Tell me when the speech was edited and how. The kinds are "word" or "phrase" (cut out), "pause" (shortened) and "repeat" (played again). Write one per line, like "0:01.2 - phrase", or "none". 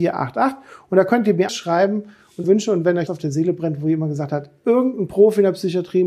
0:01.5 - word
0:02.4 - word
0:03.1 - word